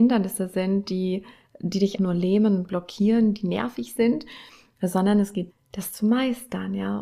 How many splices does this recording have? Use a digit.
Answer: 2